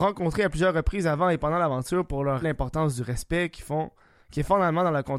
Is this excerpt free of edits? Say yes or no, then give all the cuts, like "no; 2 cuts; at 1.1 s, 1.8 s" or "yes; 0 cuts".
no; 1 cut; at 2.4 s